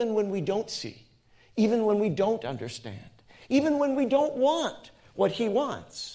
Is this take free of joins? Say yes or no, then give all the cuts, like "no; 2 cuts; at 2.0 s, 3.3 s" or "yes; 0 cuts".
yes; 0 cuts